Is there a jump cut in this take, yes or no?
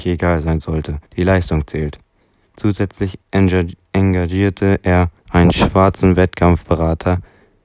yes